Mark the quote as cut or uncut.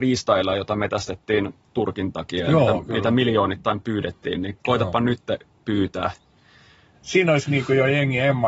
uncut